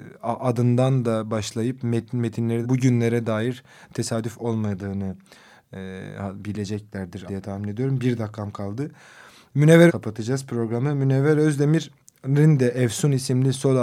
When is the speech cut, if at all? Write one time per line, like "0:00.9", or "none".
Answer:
0:02.6
0:07.3
0:09.9